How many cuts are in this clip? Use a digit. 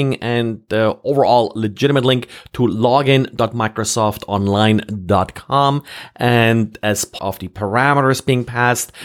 1